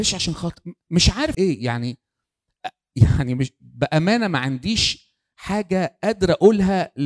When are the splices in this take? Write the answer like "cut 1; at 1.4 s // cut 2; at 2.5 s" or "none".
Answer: cut 1; at 1.3 s